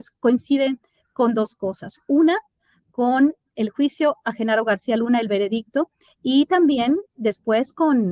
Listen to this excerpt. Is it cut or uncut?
uncut